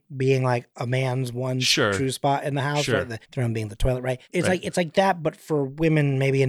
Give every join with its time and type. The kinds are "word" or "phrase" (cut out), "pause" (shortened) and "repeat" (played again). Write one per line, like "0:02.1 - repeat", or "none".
0:03.2 - pause
0:04.2 - pause